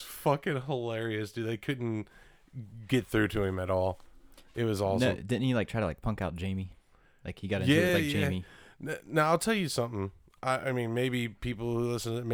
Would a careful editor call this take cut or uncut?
uncut